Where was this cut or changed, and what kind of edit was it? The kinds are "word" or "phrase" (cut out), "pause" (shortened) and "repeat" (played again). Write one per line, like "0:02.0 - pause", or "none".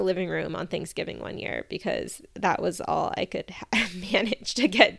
none